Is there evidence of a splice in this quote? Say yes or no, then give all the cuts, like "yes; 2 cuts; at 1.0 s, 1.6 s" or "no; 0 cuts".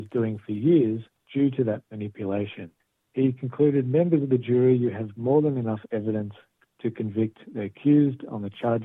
yes; 1 cut; at 2.8 s